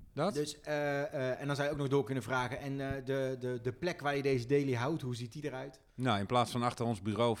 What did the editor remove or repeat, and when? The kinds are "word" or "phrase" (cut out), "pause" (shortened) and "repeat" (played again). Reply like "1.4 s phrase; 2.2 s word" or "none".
none